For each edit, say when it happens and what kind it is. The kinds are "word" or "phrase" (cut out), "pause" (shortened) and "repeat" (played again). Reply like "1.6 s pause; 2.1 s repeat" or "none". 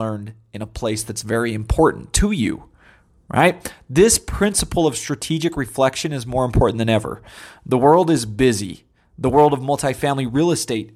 none